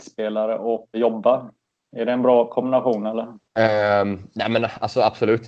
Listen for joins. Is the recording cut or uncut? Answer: cut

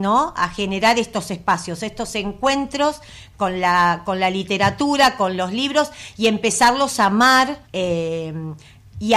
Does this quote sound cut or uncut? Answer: cut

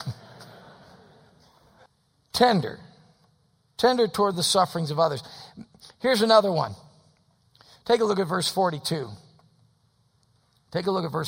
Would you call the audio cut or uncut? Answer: uncut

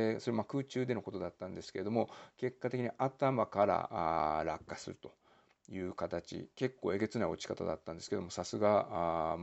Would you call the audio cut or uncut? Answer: uncut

